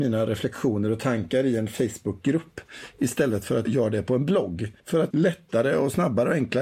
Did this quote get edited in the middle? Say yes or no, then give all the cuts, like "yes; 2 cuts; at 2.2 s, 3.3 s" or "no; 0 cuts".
yes; 3 cuts; at 3.7 s, 4.8 s, 5.1 s